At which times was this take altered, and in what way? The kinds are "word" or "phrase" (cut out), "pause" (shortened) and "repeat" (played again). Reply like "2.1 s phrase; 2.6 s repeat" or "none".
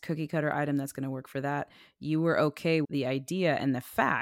2.8 s word